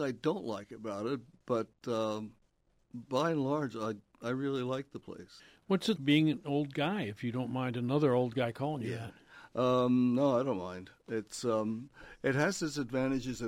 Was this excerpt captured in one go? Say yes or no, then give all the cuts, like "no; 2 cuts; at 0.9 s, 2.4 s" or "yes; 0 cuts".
no; 1 cut; at 6.0 s